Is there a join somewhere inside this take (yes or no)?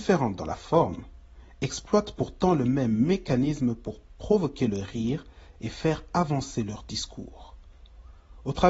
no